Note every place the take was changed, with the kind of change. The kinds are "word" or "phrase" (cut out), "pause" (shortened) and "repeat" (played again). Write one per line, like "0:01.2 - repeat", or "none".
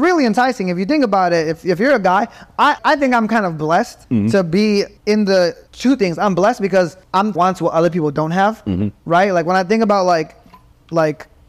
0:02.8 - word
0:04.0 - pause
0:05.0 - pause
0:05.7 - pause
0:07.0 - pause
0:07.3 - phrase